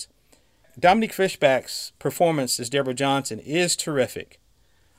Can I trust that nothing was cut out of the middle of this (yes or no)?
yes